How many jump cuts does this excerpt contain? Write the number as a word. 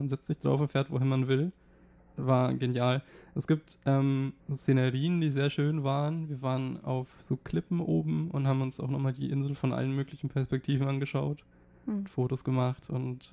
one